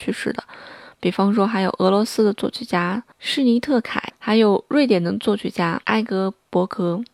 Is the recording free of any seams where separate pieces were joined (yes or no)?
no